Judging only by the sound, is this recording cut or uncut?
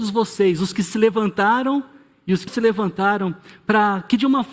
cut